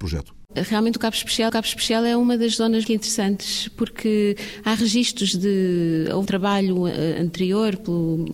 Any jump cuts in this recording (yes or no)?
yes